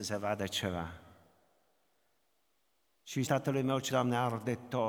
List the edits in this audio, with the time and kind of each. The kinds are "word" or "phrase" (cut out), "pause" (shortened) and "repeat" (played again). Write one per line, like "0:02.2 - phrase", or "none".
0:03.2 - word
0:03.9 - word